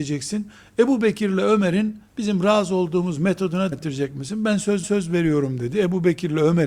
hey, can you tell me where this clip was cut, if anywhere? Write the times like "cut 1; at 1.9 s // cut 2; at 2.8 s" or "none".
cut 1; at 2.1 s // cut 2; at 3.7 s // cut 3; at 4.8 s